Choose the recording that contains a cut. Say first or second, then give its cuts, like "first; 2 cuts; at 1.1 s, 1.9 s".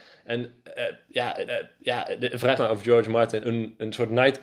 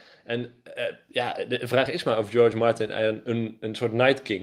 first; 3 cuts; at 1.5 s, 2.6 s, 3.4 s